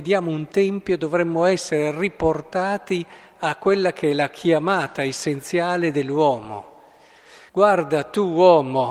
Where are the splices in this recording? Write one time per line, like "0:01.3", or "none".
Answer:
0:07.5